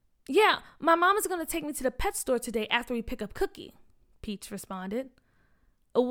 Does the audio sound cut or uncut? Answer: uncut